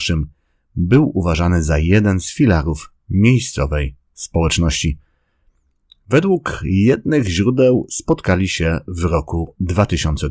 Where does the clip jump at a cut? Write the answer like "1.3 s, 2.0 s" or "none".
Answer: none